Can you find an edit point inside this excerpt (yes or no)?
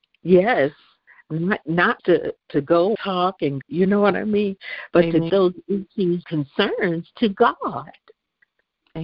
yes